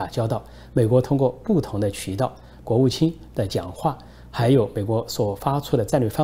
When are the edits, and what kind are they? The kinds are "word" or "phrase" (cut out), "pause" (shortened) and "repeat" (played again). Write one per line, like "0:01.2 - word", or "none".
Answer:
0:02.6 - phrase